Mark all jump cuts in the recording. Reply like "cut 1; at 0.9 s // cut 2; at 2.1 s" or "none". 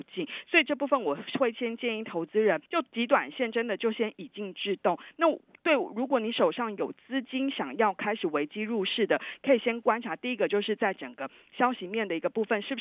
cut 1; at 2.7 s